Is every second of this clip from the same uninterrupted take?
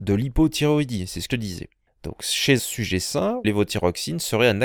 no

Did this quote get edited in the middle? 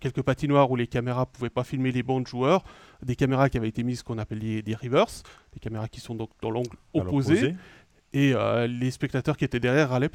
no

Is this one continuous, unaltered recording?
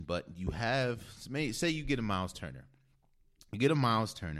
yes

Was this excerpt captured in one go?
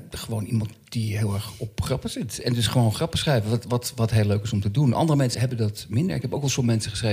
no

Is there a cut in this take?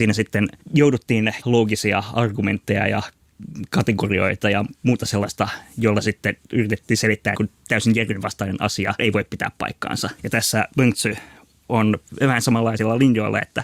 yes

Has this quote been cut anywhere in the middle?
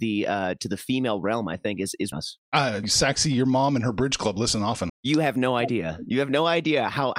yes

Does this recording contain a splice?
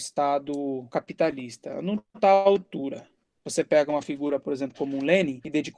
no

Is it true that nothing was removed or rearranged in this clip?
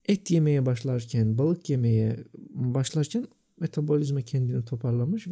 yes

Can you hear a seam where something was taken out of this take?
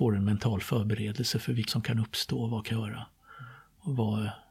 yes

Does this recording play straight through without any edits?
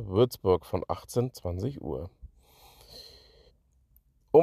no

